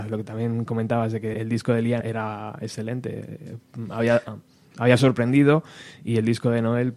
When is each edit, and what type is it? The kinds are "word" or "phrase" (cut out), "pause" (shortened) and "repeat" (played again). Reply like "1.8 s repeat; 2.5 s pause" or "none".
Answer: 1.3 s word; 2.0 s word